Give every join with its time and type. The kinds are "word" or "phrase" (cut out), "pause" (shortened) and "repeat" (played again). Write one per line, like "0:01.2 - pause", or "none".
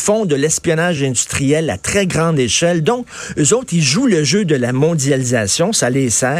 none